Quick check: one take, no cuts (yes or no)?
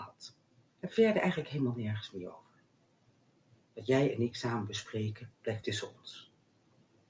yes